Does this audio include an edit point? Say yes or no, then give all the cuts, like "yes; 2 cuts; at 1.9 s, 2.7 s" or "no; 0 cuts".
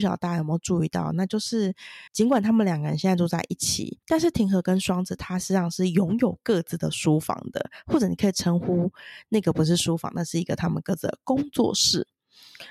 yes; 2 cuts; at 2.1 s, 4.0 s